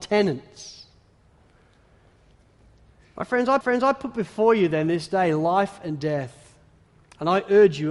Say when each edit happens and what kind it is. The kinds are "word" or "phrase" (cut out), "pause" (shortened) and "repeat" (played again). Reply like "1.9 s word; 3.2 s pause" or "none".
3.6 s repeat